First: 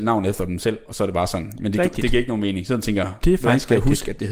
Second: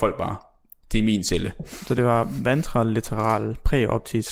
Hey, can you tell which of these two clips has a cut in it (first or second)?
first